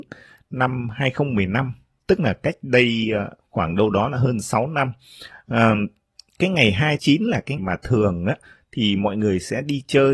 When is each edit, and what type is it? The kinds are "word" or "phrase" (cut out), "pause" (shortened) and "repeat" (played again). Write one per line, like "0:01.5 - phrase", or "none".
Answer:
0:07.0 - word
0:07.6 - word